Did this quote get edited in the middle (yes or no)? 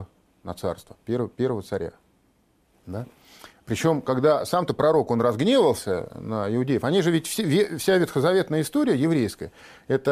no